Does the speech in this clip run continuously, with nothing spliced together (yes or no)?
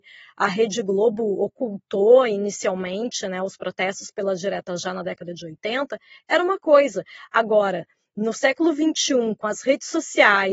yes